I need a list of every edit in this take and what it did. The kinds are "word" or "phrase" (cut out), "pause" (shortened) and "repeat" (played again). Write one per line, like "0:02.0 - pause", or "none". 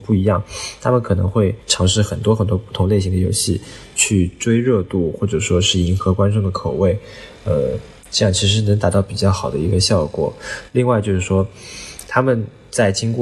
0:01.6 - pause
0:08.0 - pause